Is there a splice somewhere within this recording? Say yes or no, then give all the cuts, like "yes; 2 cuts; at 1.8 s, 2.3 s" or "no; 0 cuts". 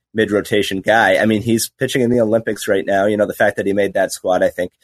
no; 0 cuts